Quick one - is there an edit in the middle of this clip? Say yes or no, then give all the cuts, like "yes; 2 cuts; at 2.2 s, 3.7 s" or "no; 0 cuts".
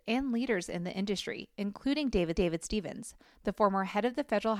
yes; 1 cut; at 2.4 s